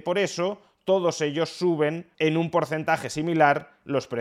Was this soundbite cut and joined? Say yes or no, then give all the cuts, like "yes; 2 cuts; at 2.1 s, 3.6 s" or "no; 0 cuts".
yes; 1 cut; at 2.1 s